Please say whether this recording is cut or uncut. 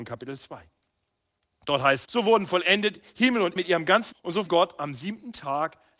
cut